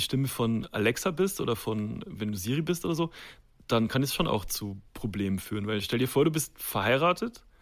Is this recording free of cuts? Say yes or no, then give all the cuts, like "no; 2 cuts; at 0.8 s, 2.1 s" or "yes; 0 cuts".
yes; 0 cuts